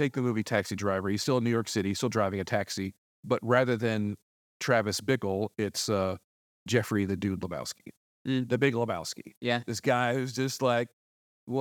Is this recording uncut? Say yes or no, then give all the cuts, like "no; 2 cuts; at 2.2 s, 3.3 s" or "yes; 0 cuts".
yes; 0 cuts